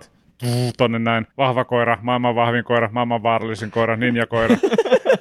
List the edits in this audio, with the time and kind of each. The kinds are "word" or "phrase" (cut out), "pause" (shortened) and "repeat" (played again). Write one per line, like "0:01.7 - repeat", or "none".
0:01.3 - pause